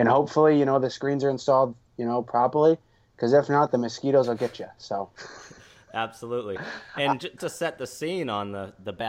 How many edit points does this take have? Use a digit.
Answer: 1